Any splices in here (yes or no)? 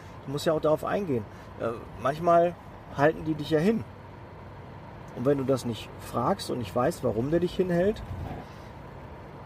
no